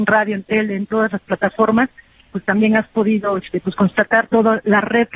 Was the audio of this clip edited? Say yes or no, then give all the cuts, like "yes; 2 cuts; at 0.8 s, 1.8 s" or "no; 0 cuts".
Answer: no; 0 cuts